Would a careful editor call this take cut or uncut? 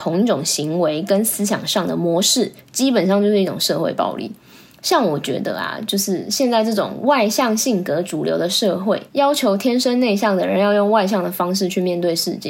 cut